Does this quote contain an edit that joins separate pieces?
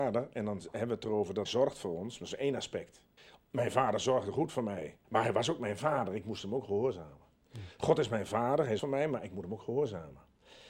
yes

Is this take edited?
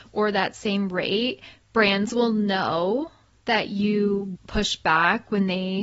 yes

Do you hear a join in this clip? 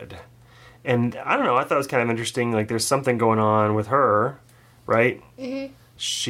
no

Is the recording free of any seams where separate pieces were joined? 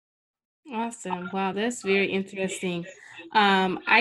yes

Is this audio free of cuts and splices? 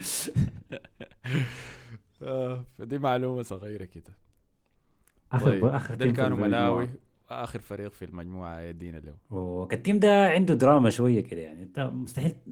yes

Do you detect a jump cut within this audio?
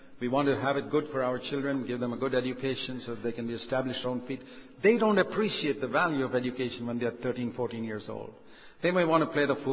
yes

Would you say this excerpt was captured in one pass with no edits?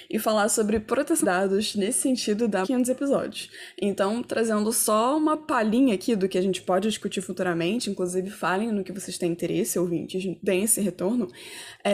no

